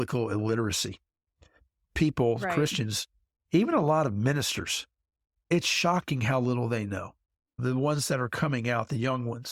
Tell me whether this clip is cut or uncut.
uncut